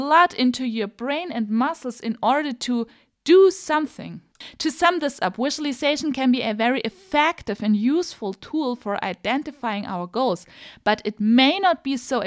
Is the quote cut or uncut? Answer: uncut